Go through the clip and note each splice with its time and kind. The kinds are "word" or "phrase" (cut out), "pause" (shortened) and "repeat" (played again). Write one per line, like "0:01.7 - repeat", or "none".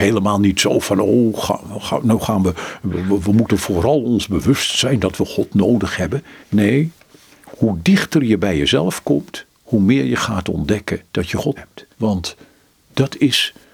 0:06.4 - pause
0:09.5 - pause
0:11.1 - pause
0:11.6 - word
0:11.9 - pause